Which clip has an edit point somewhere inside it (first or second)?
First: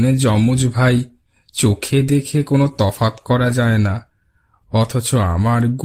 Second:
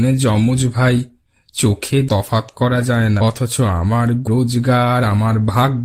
second